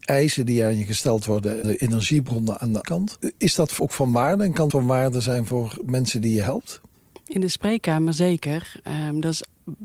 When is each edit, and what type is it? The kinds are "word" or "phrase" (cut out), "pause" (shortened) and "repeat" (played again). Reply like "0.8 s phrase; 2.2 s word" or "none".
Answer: 1.6 s word; 2.8 s word; 3.8 s word; 4.7 s word